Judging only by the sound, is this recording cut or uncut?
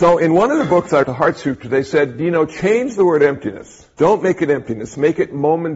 cut